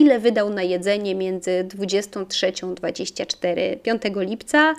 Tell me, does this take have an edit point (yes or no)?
no